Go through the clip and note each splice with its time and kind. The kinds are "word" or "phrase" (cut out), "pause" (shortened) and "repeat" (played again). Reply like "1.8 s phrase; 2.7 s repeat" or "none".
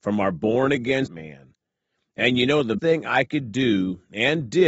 1.1 s word; 2.8 s word